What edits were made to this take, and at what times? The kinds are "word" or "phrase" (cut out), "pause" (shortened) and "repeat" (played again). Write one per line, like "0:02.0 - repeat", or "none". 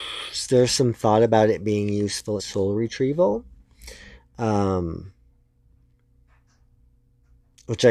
0:02.4 - word